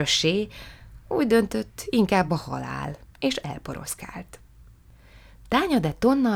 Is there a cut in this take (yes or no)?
no